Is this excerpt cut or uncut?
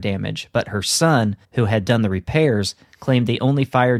cut